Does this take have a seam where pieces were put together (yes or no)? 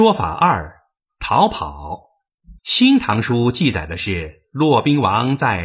yes